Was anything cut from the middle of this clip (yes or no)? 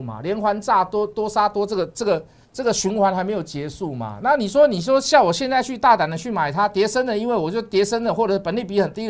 yes